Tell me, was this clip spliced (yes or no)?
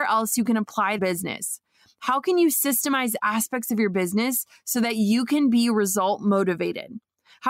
yes